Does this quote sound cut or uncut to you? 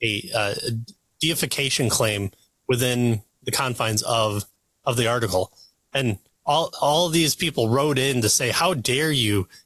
uncut